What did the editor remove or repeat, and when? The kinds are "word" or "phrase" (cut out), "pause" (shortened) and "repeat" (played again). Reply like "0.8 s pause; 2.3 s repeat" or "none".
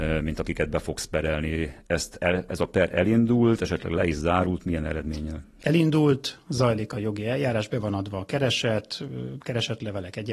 none